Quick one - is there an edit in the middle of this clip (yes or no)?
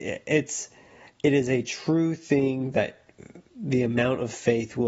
yes